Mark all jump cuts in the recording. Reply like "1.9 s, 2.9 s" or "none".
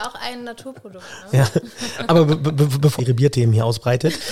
3.0 s